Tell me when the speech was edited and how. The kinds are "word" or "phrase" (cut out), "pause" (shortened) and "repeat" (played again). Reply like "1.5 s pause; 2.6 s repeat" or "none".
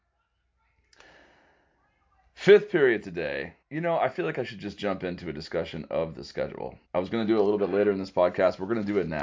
3.6 s pause; 6.8 s pause